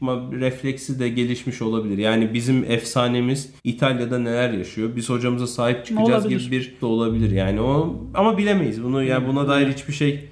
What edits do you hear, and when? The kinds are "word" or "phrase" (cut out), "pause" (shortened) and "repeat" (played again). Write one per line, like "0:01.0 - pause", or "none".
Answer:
0:03.6 - pause
0:06.8 - word